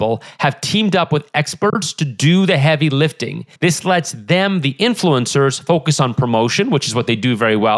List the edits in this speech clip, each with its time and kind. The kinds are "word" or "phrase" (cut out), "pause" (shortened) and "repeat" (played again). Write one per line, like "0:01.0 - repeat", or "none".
0:03.5 - pause